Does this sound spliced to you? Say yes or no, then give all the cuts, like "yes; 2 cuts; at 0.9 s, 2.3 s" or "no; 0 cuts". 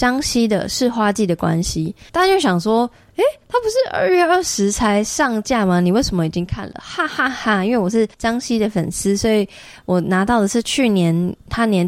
yes; 2 cuts; at 2.1 s, 8.1 s